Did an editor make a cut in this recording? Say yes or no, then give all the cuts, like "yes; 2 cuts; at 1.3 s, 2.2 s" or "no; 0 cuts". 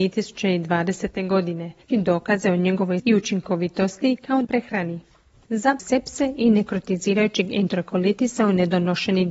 yes; 4 cuts; at 1.9 s, 3.0 s, 4.4 s, 5.8 s